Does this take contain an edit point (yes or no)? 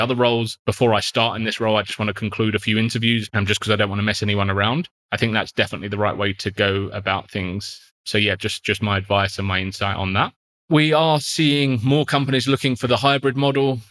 no